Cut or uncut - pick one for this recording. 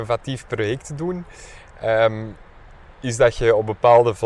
uncut